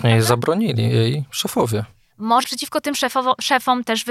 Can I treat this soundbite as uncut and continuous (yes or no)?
no